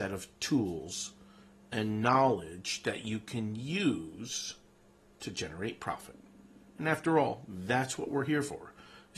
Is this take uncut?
yes; 0 cuts

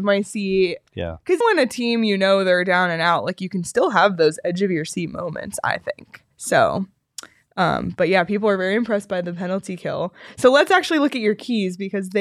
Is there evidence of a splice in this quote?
yes; 2 cuts; at 1.4 s, 6.3 s

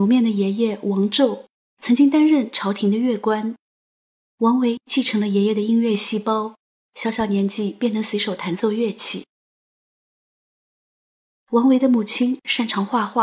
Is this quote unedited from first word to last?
yes; 0 cuts

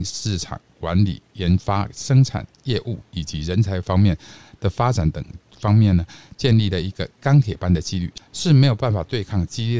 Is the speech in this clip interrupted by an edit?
no; 0 cuts

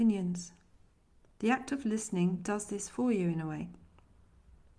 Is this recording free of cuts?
yes; 0 cuts

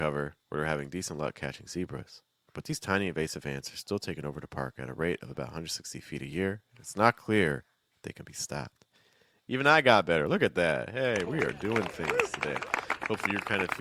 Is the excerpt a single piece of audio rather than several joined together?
yes; 0 cuts

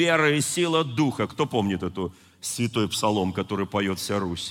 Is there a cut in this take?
no; 0 cuts

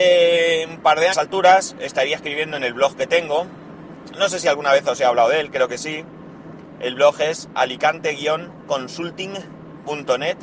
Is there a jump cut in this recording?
yes; 1 cut; at 1.1 s

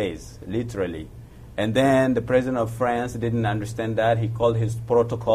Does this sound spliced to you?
no; 0 cuts

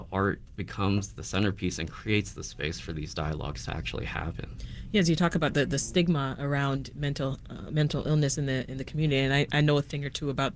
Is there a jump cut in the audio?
no; 0 cuts

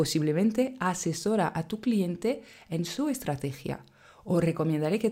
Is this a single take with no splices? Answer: yes; 0 cuts

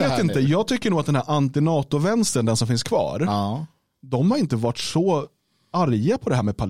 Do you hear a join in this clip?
no; 0 cuts

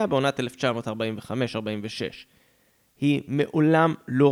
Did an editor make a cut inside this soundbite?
no; 0 cuts

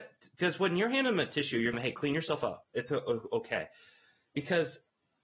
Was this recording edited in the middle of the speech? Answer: yes; 2 cuts; at 1.7 s, 2.6 s

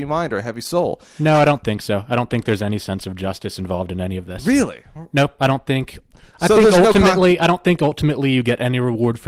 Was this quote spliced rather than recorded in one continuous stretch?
no; 0 cuts

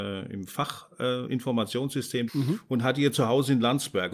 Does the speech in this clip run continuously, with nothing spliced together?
no; 1 cut; at 2.3 s

